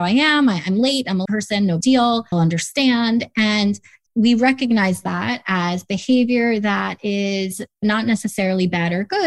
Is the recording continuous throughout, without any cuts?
no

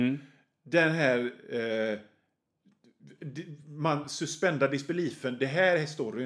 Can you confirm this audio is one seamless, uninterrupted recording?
yes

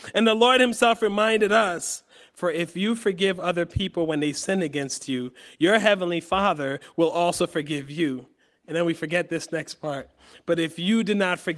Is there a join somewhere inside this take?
no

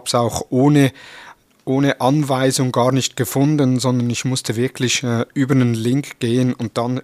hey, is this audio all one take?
no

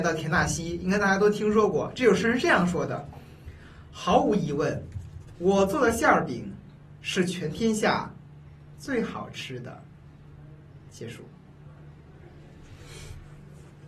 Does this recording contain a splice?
no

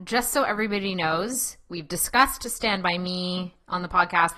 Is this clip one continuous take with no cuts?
yes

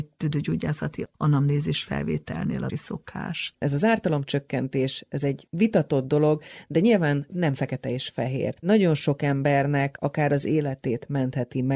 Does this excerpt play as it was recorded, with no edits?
no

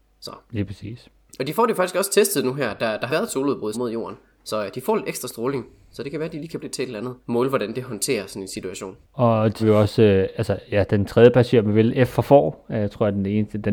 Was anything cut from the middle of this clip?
yes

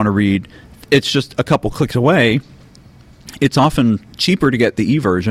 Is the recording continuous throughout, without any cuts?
yes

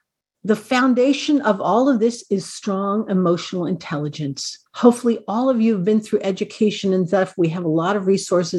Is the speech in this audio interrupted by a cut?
yes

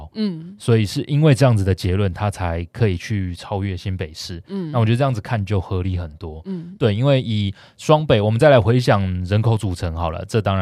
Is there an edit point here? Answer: no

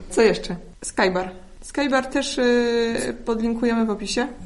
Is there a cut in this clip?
no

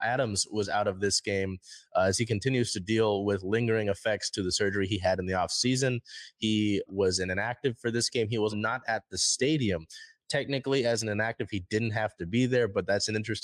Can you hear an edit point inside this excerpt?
yes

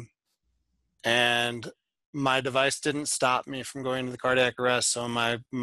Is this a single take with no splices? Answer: yes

